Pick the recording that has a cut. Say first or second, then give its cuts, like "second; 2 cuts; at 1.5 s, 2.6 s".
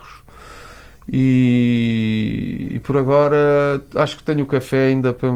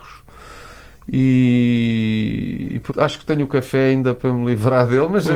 second; 1 cut; at 2.9 s